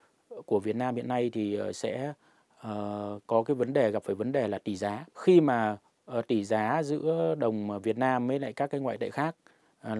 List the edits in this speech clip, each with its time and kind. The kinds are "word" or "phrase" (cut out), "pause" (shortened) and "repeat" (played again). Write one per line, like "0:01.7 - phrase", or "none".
0:05.1 - pause